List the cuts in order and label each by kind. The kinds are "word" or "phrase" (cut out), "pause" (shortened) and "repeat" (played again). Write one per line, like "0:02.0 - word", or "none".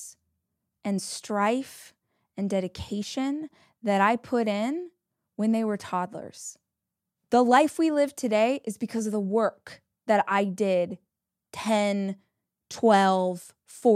none